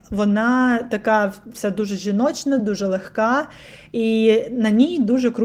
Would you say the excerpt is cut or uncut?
uncut